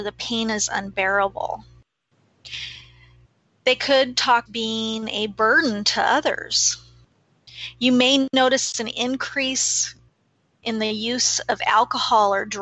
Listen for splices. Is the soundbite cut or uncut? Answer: cut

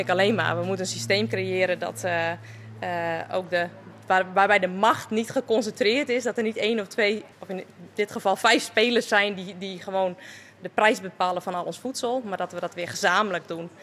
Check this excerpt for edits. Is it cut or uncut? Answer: cut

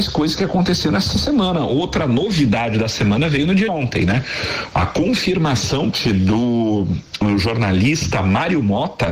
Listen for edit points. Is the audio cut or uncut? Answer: cut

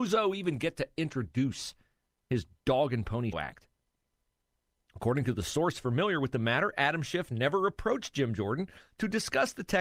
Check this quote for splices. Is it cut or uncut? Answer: cut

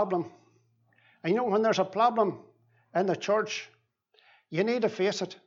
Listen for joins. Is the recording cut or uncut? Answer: uncut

